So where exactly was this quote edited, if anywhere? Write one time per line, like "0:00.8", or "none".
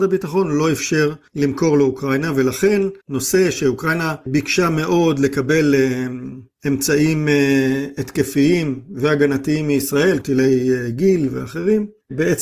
0:03.0
0:10.2

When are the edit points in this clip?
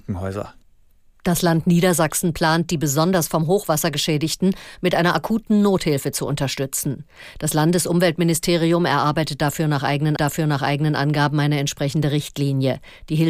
0:10.2

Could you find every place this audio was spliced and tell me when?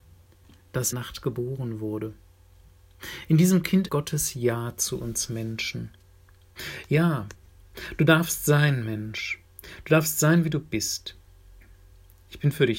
0:00.9
0:03.9
0:09.5

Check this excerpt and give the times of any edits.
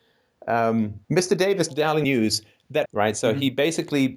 0:01.0
0:01.7
0:02.0
0:02.8

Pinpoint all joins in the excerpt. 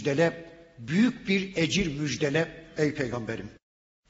none

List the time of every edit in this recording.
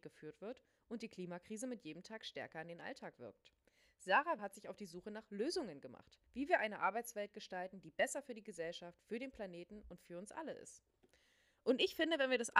0:04.4
0:06.3

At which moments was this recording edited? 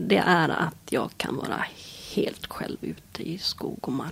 none

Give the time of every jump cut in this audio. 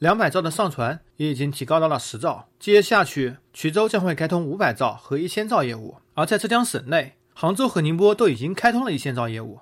none

